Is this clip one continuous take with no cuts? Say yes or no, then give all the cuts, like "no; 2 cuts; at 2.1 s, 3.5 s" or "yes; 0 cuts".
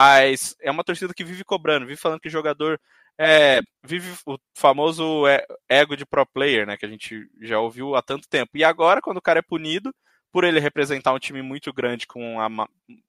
no; 1 cut; at 3.7 s